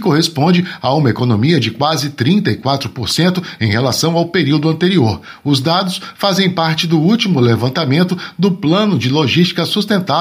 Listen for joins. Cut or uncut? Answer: uncut